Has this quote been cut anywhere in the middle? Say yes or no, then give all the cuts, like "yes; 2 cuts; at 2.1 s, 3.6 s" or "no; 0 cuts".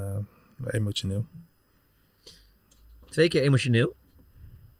no; 0 cuts